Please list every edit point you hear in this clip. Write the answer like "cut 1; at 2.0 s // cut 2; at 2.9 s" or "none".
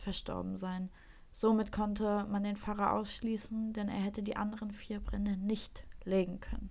none